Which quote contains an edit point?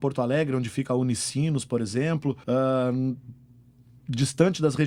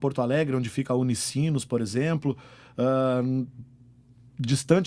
first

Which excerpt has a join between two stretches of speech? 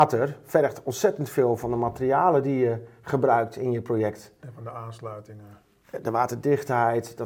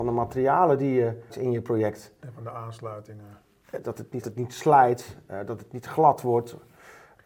second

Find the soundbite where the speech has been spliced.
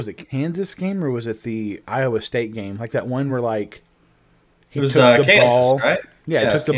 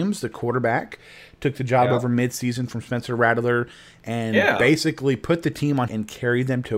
second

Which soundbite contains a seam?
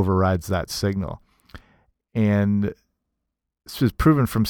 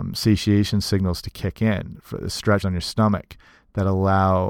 second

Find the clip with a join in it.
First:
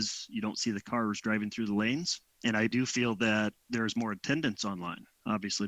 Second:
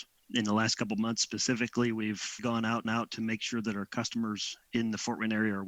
second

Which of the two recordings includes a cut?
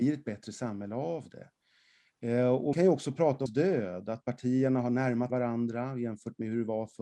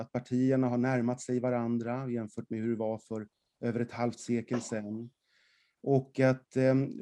first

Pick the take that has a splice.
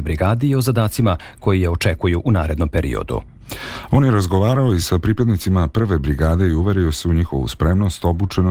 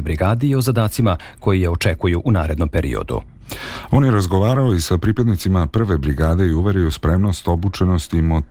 second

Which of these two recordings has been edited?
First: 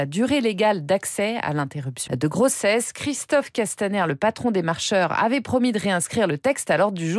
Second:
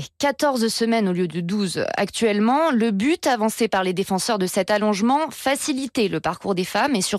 first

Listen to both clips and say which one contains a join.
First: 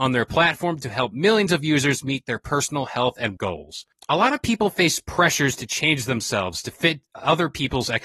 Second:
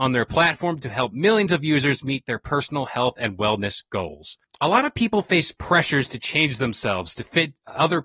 first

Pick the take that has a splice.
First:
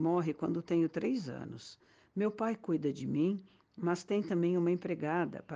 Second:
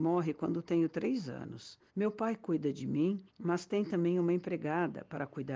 second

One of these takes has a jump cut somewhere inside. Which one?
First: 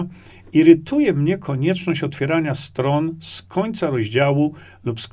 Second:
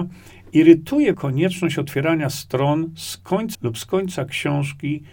second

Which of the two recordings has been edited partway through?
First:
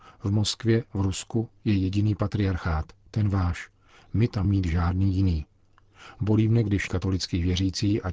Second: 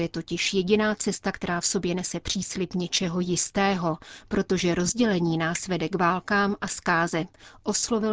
first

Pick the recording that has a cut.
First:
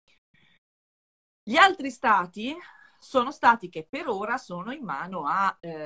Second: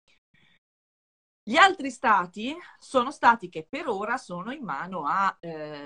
second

